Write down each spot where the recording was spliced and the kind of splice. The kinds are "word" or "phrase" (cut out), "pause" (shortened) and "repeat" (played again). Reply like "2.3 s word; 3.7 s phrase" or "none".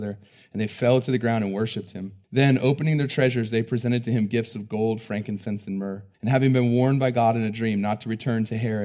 2.2 s pause; 6.1 s pause